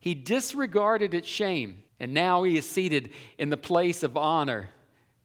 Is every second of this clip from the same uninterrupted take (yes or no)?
no